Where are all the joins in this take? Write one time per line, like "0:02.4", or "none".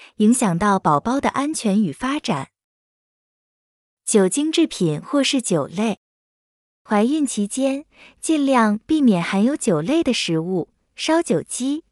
none